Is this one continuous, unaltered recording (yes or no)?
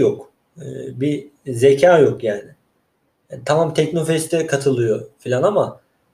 yes